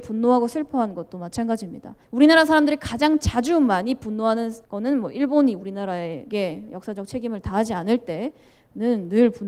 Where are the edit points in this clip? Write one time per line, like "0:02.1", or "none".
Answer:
0:02.0
0:04.6